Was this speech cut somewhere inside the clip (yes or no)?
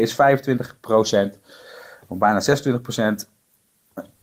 no